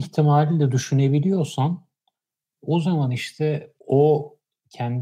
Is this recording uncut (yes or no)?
no